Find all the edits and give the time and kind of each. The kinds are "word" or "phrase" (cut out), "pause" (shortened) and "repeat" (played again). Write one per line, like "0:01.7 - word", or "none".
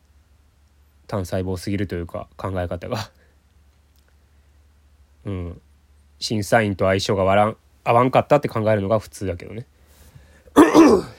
none